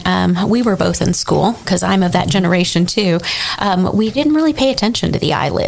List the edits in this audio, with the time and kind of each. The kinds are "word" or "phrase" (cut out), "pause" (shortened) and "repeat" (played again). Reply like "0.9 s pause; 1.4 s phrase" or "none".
none